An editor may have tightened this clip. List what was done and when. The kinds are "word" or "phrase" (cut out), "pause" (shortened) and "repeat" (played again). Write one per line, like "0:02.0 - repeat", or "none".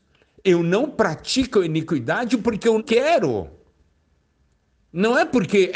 0:02.8 - word